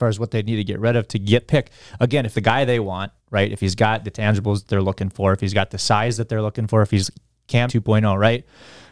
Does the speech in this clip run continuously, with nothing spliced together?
no; 4 cuts; at 1.4 s, 2.3 s, 3.2 s, 7.7 s

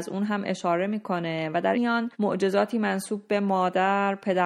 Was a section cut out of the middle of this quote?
yes; 2 cuts; at 1.7 s, 2.1 s

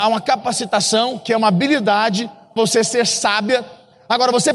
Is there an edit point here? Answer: yes; 1 cut; at 2.6 s

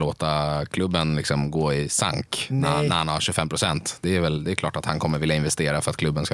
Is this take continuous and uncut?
yes; 0 cuts

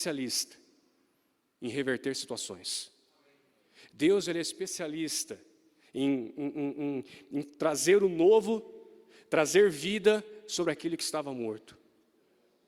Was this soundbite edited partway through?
no; 0 cuts

